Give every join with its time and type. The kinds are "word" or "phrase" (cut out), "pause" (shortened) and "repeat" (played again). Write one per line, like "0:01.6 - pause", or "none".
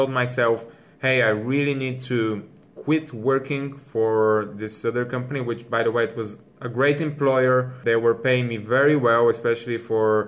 none